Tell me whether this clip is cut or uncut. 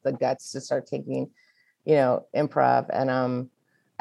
uncut